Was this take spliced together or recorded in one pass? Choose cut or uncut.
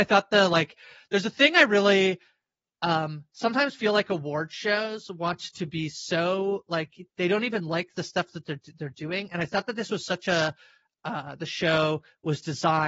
uncut